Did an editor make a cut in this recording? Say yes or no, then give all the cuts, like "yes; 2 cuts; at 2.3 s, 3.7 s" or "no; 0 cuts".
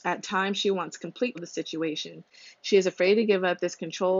yes; 1 cut; at 1.3 s